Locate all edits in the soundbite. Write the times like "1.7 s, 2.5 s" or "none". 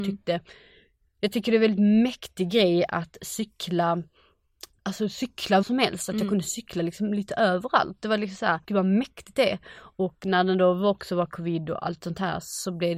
4.8 s, 5.6 s, 8.6 s